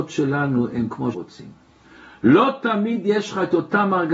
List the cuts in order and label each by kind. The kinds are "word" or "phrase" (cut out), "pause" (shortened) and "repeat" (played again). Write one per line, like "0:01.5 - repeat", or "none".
0:01.1 - word